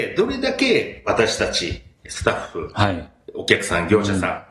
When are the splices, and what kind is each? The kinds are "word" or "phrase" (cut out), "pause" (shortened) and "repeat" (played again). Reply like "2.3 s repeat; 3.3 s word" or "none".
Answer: none

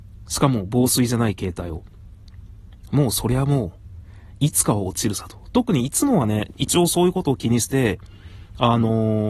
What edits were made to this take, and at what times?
none

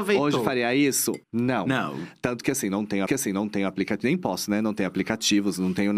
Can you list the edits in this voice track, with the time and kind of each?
1.2 s pause; 3.1 s repeat

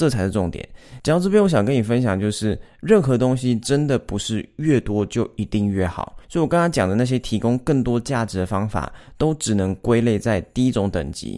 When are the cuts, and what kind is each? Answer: 6.2 s pause

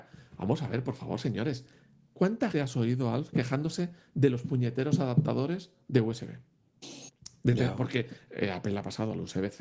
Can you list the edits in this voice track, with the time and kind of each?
2.5 s word

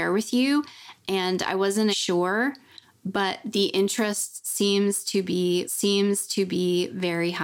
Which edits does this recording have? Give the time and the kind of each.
1.9 s word; 5.6 s repeat

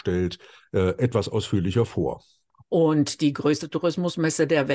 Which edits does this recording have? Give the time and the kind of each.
none

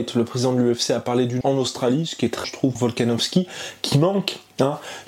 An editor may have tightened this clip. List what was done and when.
1.4 s word; 2.4 s word; 2.8 s word

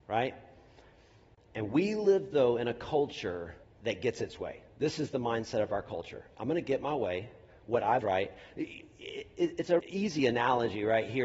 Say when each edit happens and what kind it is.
3.6 s pause; 8.0 s phrase; 9.8 s word

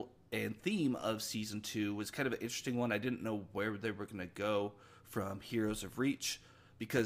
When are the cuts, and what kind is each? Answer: none

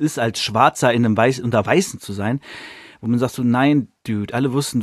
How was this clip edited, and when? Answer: none

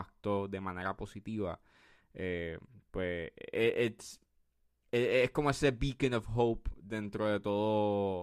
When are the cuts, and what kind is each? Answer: none

